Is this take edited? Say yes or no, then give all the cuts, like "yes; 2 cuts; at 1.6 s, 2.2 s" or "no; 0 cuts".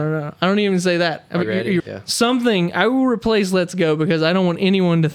yes; 2 cuts; at 1.4 s, 1.8 s